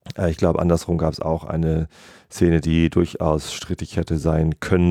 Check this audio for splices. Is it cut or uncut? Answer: uncut